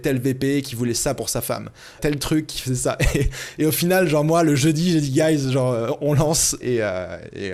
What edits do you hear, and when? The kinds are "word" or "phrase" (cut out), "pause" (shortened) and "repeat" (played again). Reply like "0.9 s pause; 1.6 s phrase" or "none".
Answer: 2.0 s word; 6.6 s word